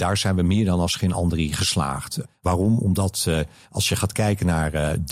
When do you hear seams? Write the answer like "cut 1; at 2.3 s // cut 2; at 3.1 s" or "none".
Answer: none

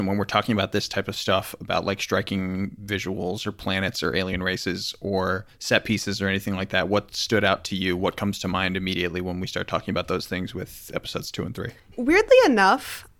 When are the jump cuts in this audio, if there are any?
cut 1; at 11.8 s

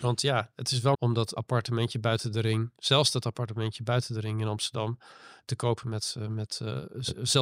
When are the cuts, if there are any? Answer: cut 1; at 0.9 s // cut 2; at 1.4 s

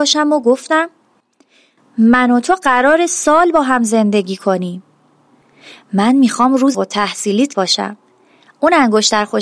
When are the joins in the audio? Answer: cut 1; at 3.1 s // cut 2; at 6.7 s // cut 3; at 7.5 s

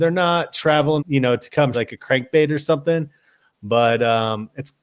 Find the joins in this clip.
cut 1; at 1.0 s // cut 2; at 1.7 s

